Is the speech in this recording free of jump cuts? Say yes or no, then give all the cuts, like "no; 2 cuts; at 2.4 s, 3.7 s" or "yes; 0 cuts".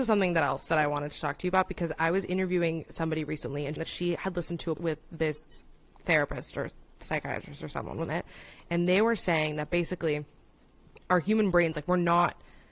no; 3 cuts; at 3.8 s, 4.8 s, 8.0 s